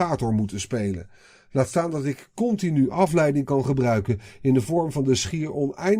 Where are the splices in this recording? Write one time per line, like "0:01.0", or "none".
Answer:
none